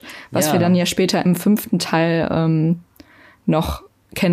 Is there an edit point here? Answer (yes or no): no